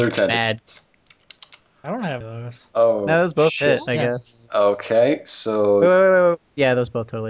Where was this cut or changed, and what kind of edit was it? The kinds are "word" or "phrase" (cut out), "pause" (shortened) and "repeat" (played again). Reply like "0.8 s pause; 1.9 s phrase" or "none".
2.2 s word; 2.7 s pause